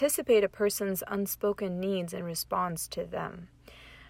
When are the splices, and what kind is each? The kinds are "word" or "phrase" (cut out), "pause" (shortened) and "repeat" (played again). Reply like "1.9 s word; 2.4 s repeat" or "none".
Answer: none